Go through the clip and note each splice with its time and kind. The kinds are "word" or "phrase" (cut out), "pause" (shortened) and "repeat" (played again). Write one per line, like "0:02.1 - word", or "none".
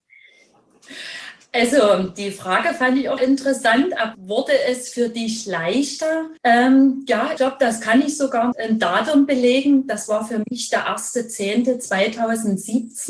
0:03.2 - word
0:04.1 - word
0:06.4 - pause
0:07.4 - word
0:08.5 - word